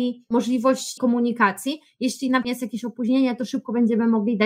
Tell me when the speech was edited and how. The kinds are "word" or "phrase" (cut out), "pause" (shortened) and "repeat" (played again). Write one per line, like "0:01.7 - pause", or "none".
0:01.0 - word
0:02.4 - word